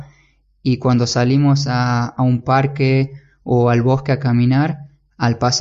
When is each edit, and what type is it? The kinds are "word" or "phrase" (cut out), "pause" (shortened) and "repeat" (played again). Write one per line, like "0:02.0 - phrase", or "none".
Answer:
none